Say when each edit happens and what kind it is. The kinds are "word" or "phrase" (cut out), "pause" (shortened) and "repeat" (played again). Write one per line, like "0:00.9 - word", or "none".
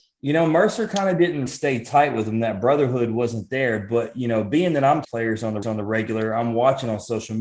0:01.5 - word
0:05.0 - phrase
0:05.6 - repeat